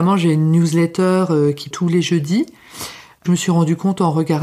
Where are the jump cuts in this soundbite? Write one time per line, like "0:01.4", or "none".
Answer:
0:01.7
0:03.3